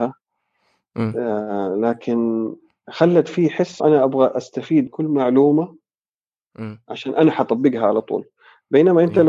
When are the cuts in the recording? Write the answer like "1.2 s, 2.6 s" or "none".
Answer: 3.8 s, 4.9 s